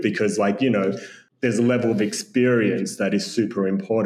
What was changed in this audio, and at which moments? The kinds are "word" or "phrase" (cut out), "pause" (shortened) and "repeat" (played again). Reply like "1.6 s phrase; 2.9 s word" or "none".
none